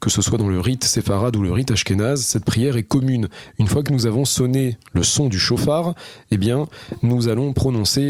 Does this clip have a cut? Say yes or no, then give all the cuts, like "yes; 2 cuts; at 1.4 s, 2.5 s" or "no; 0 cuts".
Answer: no; 0 cuts